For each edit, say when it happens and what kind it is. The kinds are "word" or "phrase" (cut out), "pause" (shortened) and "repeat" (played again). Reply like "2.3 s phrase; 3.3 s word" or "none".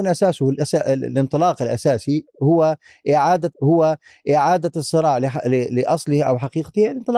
3.5 s repeat